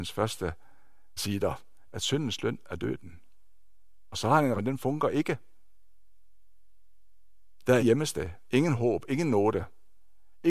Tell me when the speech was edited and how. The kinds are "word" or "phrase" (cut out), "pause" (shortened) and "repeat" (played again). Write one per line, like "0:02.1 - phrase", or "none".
0:01.2 - word
0:04.6 - word
0:07.8 - word